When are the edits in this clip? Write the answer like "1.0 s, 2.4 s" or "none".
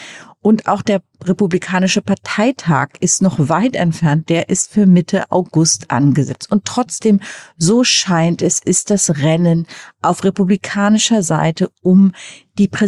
none